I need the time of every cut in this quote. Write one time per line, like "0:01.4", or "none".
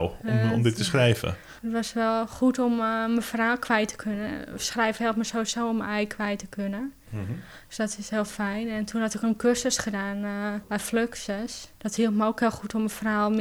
0:01.6
0:10.6
0:11.8